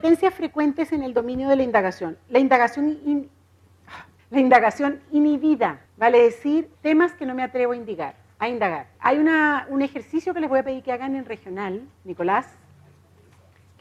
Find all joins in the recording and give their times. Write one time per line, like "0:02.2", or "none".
0:04.2
0:05.9
0:06.7
0:08.9
0:11.9